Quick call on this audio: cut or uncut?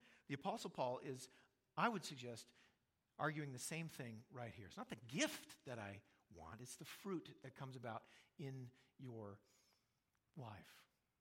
uncut